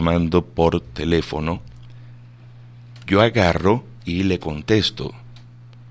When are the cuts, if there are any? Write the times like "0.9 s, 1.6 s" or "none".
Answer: 3.1 s, 4.0 s